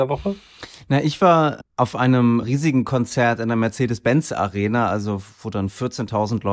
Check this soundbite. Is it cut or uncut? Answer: cut